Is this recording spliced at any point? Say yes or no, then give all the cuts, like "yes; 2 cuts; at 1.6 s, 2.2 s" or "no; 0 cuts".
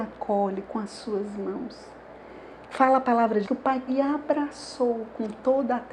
yes; 2 cuts; at 3.4 s, 3.9 s